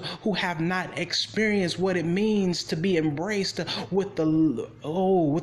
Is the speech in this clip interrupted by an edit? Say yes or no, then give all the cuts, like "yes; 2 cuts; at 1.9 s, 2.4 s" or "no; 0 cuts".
no; 0 cuts